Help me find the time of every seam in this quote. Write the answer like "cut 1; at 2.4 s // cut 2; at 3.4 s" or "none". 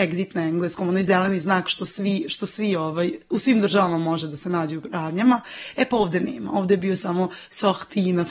none

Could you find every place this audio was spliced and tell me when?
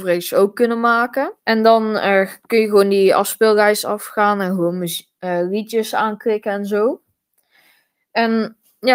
cut 1; at 1.4 s

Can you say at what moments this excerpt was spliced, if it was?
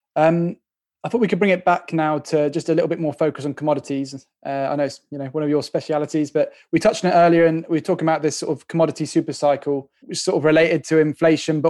cut 1; at 10.0 s

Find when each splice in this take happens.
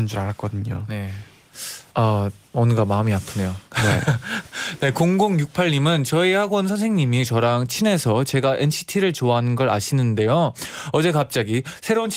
cut 1; at 1.9 s // cut 2; at 2.5 s // cut 3; at 3.7 s

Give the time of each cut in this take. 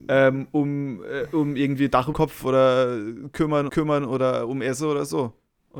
cut 1; at 2.1 s // cut 2; at 3.7 s

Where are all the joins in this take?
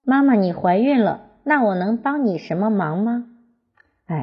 none

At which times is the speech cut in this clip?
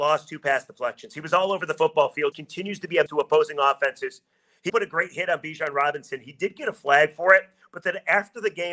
cut 1; at 2.3 s // cut 2; at 3.1 s // cut 3; at 4.7 s

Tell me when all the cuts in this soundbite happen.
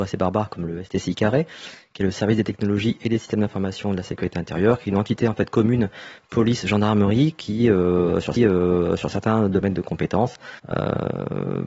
cut 1; at 8.4 s // cut 2; at 10.6 s

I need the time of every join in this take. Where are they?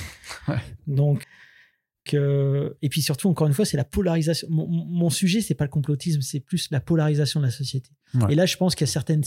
cut 1; at 1.2 s // cut 2; at 2.1 s

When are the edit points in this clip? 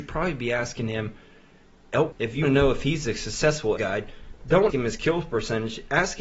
cut 1; at 2.1 s // cut 2; at 2.4 s // cut 3; at 3.8 s // cut 4; at 4.7 s

